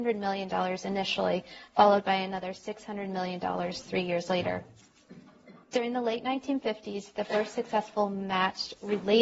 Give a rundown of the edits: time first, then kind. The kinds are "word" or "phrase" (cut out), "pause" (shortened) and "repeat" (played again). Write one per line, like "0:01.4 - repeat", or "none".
0:05.6 - pause